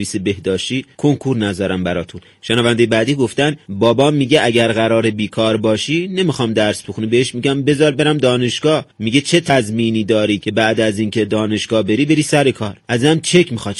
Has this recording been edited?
yes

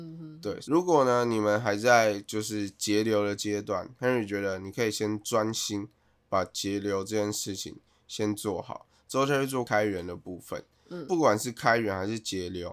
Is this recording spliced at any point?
no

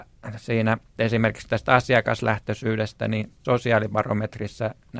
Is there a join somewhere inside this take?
yes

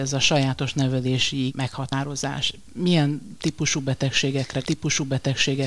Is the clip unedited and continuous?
no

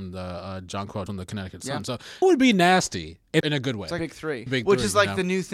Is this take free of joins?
no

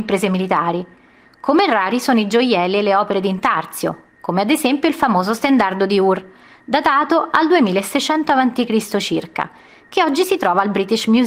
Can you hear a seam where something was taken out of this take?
no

